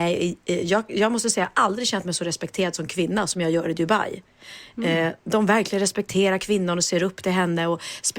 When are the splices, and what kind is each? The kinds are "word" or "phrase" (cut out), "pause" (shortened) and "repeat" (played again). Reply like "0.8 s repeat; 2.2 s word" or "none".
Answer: none